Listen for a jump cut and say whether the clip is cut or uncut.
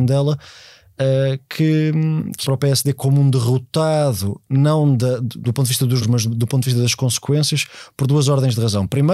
cut